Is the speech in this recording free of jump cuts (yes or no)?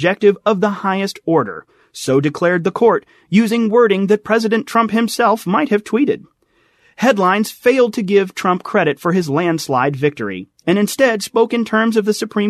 yes